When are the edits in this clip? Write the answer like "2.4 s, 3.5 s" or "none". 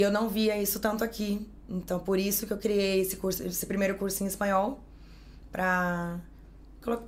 none